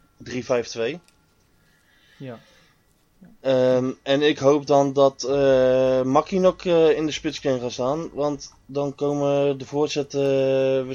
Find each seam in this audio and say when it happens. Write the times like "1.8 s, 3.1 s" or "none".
none